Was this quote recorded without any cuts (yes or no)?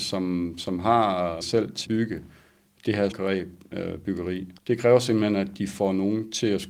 no